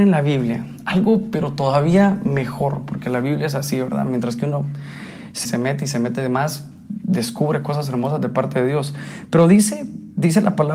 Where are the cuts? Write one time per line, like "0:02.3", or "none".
0:05.5